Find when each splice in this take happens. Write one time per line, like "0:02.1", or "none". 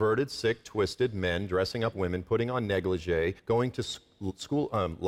0:01.9
0:03.4